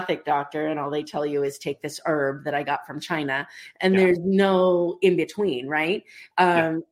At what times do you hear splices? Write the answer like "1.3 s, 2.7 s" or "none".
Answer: none